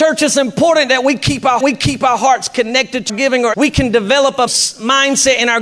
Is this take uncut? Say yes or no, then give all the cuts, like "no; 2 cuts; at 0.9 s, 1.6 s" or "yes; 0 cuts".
no; 4 cuts; at 1.6 s, 3.1 s, 3.5 s, 4.5 s